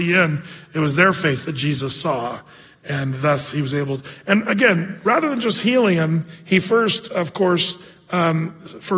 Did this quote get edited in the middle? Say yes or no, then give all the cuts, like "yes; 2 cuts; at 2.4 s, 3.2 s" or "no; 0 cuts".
no; 0 cuts